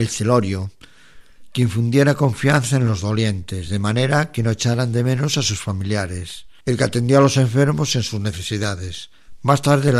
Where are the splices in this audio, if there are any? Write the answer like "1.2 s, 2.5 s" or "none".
6.6 s